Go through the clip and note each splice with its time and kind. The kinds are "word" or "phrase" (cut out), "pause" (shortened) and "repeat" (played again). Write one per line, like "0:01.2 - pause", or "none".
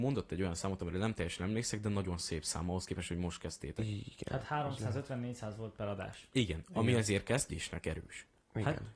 none